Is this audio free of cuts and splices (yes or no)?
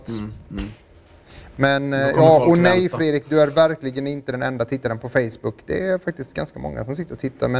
no